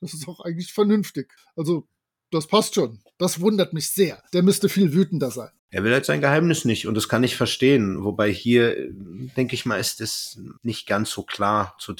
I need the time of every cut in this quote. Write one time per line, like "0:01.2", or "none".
0:01.4
0:04.3
0:05.6
0:10.6